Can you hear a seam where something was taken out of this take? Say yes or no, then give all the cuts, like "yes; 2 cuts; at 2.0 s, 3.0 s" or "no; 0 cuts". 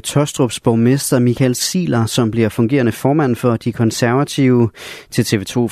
no; 0 cuts